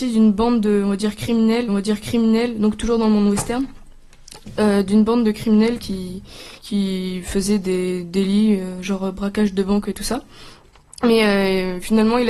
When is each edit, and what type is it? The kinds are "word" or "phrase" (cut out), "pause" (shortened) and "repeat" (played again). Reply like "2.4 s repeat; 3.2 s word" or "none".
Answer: 1.7 s repeat; 6.6 s pause